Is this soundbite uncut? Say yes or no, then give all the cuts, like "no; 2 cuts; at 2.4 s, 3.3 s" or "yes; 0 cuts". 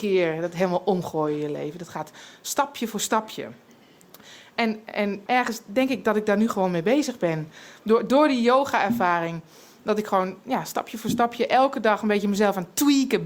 no; 1 cut; at 5.3 s